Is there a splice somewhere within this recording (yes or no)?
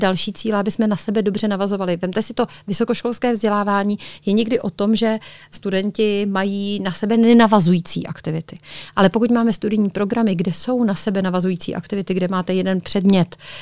no